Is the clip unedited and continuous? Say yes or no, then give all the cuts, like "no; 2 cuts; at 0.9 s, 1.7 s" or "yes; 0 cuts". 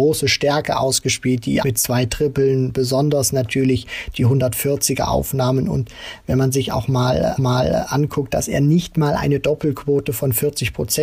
no; 2 cuts; at 1.6 s, 7.4 s